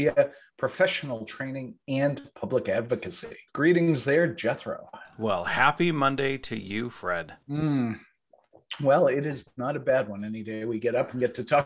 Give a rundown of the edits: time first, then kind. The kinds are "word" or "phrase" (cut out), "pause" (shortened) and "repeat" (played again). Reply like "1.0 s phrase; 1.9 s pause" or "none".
3.5 s pause; 7.4 s pause